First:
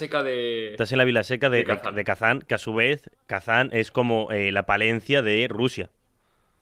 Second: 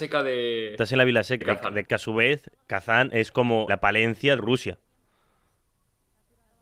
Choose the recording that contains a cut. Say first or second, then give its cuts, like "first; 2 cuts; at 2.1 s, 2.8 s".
second; 4 cuts; at 1.4 s, 1.8 s, 3.7 s, 4.4 s